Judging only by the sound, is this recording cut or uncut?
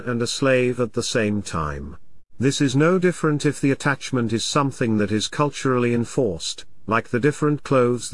cut